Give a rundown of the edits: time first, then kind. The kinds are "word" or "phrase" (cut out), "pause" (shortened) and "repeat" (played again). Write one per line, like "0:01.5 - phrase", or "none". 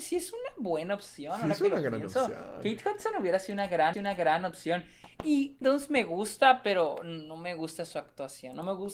0:03.9 - repeat
0:05.6 - word